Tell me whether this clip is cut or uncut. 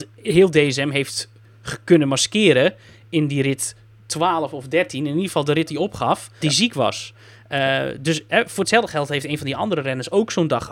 cut